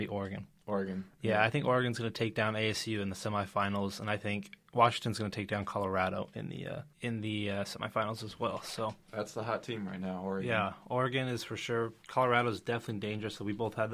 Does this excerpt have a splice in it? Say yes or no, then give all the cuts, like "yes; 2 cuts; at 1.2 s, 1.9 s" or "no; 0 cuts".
yes; 2 cuts; at 4.6 s, 6.9 s